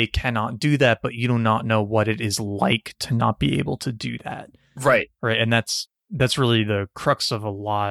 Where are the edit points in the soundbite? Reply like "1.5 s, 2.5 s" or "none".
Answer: none